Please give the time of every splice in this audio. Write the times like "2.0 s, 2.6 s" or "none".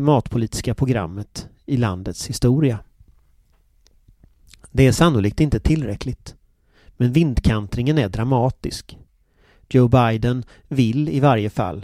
none